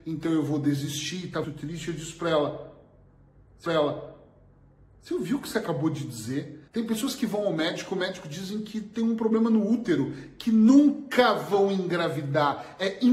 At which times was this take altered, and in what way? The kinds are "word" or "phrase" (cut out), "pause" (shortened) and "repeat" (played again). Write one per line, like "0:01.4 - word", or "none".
0:01.4 - word
0:03.7 - repeat
0:06.7 - pause